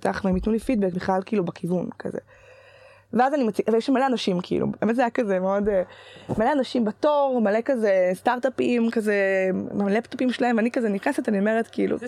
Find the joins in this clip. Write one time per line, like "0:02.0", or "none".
0:00.9
0:04.8

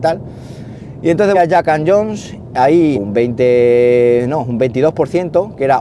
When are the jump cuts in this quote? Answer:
0:01.3
0:02.9

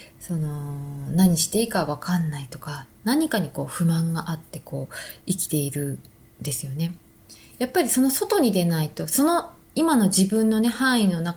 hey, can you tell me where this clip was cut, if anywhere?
none

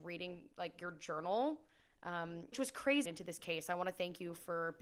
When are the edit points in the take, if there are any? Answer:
0:02.5
0:03.0

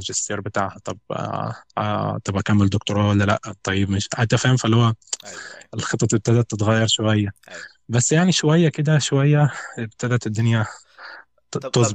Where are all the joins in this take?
none

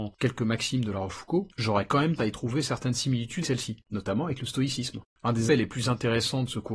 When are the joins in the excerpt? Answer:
0:02.2
0:03.4
0:03.8
0:05.5

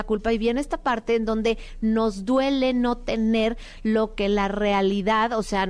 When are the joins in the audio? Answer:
none

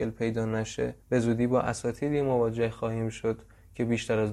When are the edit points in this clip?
0:01.0

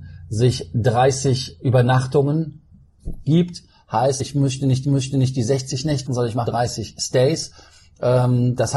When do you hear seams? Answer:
0:04.2
0:04.8
0:06.1
0:06.5

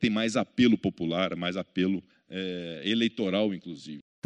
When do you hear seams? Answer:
0:02.1

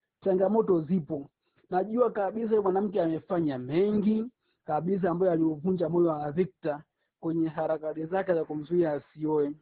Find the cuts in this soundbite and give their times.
none

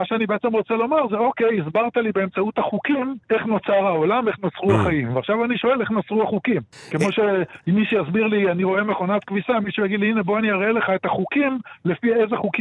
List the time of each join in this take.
0:03.2

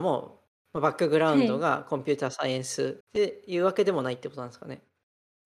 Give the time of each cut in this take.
0:03.0

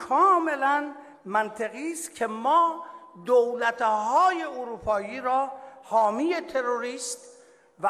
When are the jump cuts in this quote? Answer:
none

